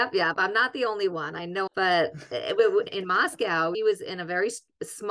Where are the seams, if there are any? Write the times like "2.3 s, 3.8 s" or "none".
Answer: 1.7 s, 2.9 s, 3.7 s